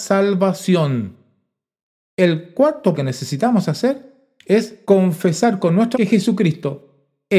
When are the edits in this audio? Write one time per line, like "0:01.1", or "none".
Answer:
0:03.0
0:04.8
0:05.9